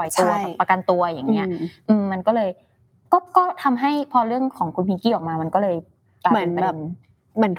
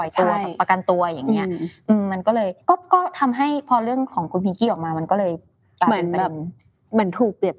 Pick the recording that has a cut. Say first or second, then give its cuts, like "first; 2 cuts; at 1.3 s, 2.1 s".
second; 1 cut; at 2.6 s